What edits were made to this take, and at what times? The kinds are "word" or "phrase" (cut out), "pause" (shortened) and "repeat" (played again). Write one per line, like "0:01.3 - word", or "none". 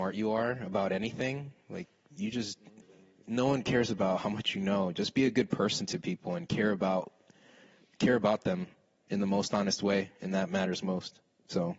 0:02.8 - pause